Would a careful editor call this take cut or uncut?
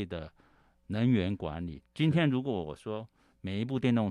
uncut